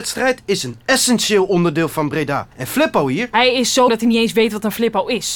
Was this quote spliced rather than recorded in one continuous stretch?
yes; 2 cuts; at 2.5 s, 3.9 s

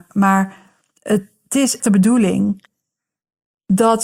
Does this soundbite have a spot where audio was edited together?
yes; 1 cut; at 1.8 s

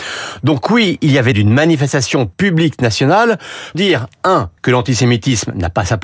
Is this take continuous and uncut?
no; 4 cuts; at 1.3 s, 2.3 s, 3.7 s, 4.6 s

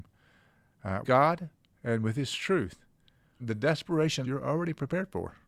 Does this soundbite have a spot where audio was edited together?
yes; 3 cuts; at 1.0 s, 3.4 s, 4.2 s

